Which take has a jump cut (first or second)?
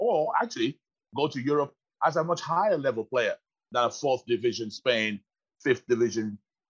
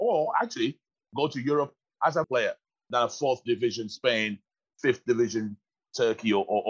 second